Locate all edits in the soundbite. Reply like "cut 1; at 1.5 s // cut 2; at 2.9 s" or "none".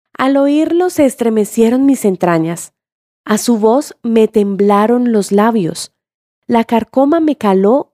none